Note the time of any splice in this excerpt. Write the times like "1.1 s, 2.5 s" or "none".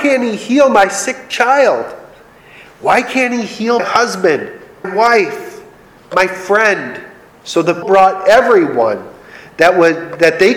3.8 s, 4.8 s, 7.3 s, 7.8 s